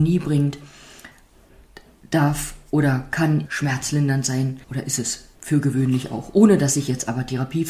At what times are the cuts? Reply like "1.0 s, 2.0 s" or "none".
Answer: 3.5 s, 4.6 s, 5.4 s